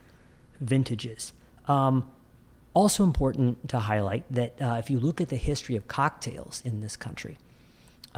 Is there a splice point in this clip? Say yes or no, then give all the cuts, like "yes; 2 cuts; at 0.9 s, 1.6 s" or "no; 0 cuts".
no; 0 cuts